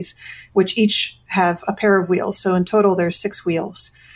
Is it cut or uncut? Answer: uncut